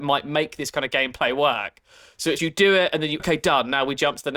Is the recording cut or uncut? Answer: cut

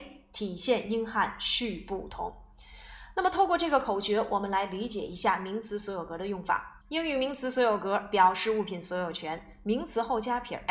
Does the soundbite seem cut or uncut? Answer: cut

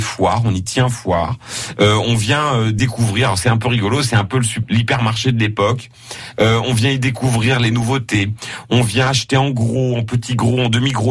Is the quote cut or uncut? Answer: uncut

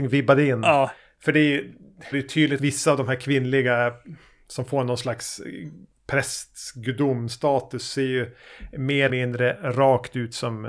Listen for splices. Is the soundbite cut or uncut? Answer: cut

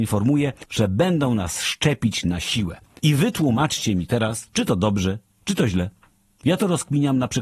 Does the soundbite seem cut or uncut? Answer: uncut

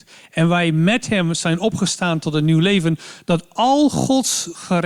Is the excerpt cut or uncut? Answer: uncut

